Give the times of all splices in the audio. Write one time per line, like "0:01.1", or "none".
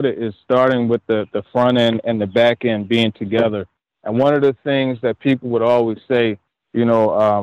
none